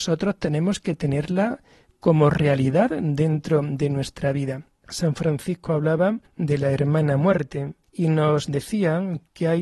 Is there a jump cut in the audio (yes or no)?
no